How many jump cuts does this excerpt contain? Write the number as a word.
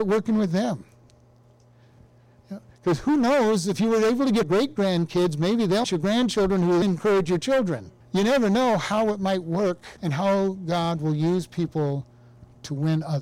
five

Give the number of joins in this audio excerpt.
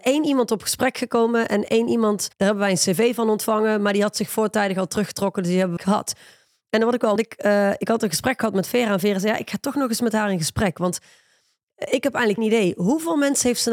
four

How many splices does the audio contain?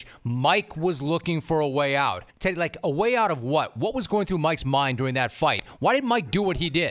one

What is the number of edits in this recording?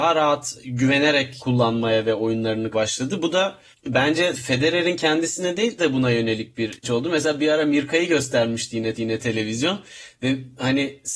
five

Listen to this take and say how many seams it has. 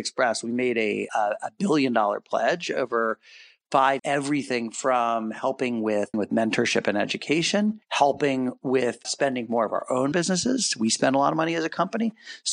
six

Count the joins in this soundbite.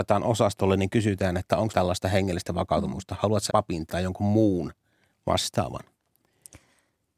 three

